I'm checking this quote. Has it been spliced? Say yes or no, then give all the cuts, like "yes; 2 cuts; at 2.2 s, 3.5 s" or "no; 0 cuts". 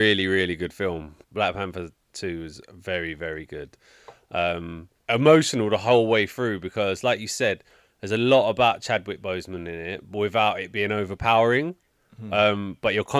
yes; 2 cuts; at 1.2 s, 5.0 s